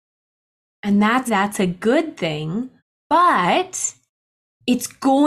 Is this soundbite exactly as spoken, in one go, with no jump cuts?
no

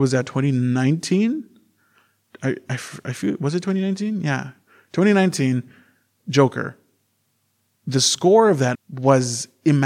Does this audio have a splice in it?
yes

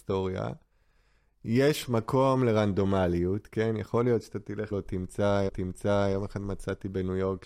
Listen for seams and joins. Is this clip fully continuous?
no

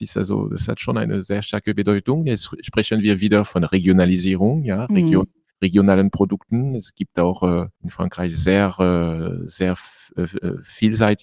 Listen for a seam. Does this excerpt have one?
yes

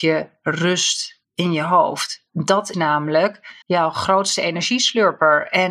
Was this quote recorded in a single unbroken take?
no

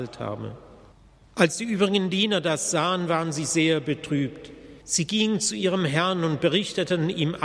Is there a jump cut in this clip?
yes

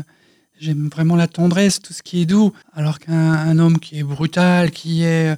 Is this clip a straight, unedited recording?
no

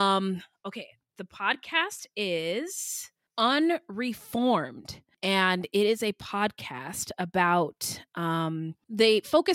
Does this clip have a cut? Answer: no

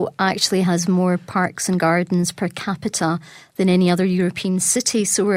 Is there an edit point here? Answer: no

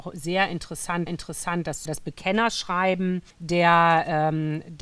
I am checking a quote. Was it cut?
yes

